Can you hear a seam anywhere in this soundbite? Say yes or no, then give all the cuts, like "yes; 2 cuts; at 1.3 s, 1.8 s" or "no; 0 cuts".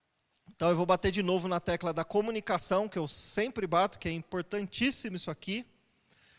no; 0 cuts